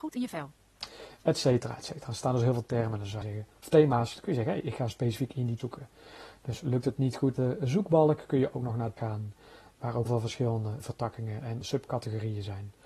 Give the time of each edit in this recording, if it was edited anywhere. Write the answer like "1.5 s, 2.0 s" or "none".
3.2 s, 3.5 s, 5.6 s, 7.4 s, 9.0 s, 10.0 s, 10.8 s, 11.6 s

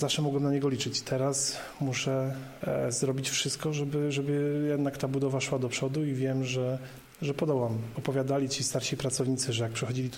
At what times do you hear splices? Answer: none

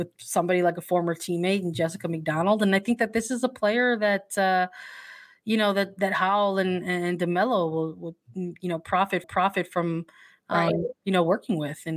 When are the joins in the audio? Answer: 9.2 s

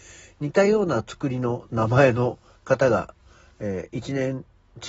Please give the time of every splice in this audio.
none

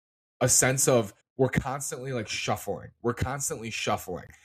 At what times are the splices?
1.2 s

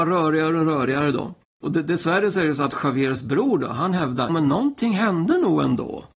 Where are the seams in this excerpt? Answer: 1.5 s, 4.3 s

